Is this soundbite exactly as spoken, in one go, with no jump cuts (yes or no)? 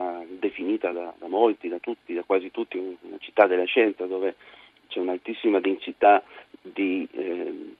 yes